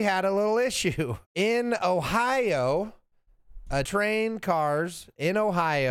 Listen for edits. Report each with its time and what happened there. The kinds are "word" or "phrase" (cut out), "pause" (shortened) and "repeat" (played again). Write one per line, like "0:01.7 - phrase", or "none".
0:01.2 - pause
0:03.8 - word